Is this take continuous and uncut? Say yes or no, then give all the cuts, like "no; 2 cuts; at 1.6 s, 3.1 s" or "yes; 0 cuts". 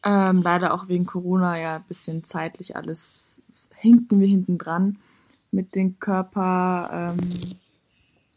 yes; 0 cuts